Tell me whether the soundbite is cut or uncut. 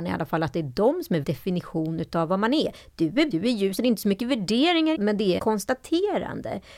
cut